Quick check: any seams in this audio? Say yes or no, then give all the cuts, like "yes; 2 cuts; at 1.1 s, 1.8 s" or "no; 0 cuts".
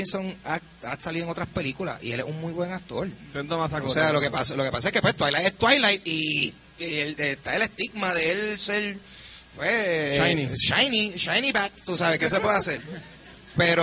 no; 0 cuts